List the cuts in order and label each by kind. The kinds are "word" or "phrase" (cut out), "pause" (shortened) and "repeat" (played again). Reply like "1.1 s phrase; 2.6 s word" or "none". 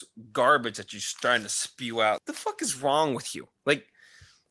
2.2 s word

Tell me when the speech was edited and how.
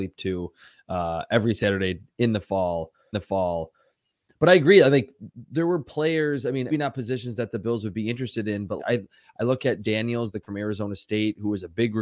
3.1 s repeat; 6.7 s word; 8.8 s word; 9.8 s word; 10.4 s word

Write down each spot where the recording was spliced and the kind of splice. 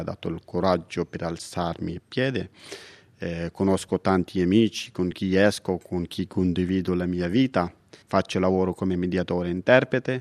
none

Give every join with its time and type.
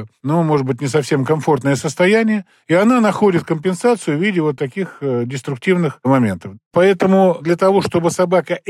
none

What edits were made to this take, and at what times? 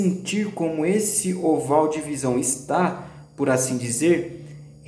none

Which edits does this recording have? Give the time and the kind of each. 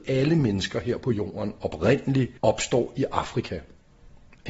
2.4 s pause

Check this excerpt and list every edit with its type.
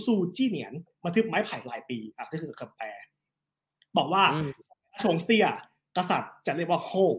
none

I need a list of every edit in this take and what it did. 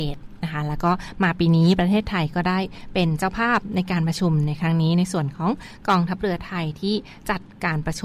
none

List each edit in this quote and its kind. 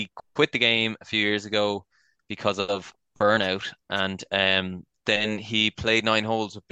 none

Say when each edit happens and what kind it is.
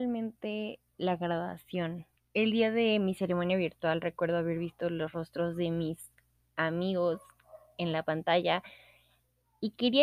2.2 s pause

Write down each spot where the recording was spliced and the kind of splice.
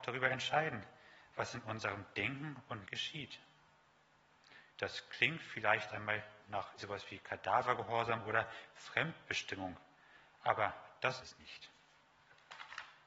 2.9 s word; 4.7 s pause; 5.9 s word; 6.4 s word; 6.8 s word; 11.2 s word

